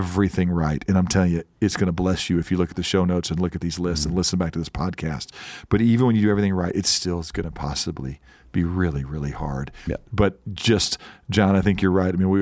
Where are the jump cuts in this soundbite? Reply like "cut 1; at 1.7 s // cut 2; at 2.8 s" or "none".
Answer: none